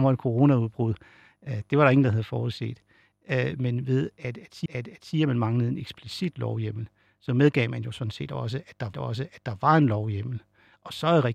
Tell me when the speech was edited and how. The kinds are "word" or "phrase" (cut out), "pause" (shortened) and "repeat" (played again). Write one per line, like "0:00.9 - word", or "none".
0:04.7 - repeat
0:08.9 - repeat